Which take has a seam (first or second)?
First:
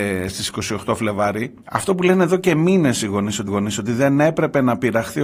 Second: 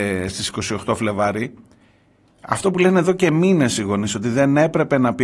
first